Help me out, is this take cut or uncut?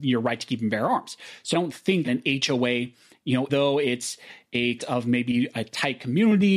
cut